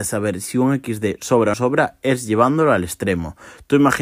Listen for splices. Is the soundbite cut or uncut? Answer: cut